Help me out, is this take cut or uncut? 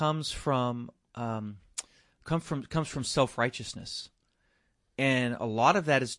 uncut